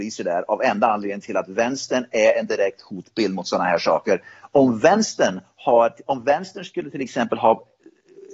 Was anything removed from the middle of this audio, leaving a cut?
no; 0 cuts

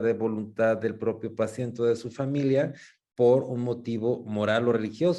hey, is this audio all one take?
yes; 0 cuts

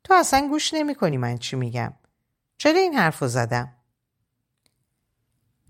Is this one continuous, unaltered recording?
yes; 0 cuts

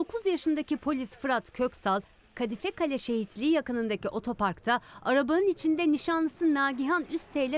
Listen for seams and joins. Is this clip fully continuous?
yes; 0 cuts

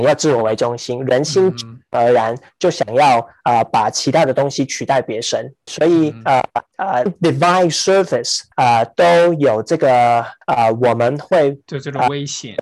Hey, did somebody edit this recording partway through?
yes; 5 cuts; at 5.7 s, 6.7 s, 7.1 s, 8.5 s, 10.4 s

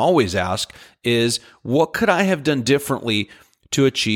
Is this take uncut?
yes; 0 cuts

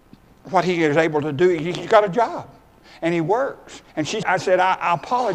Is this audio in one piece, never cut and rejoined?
no; 2 cuts; at 3.9 s, 4.2 s

